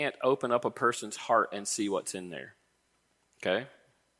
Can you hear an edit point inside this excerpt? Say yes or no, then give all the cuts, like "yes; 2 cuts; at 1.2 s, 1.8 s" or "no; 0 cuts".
no; 0 cuts